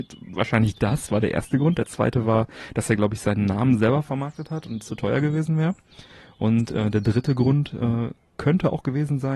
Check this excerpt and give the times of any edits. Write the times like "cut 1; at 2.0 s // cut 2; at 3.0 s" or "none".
none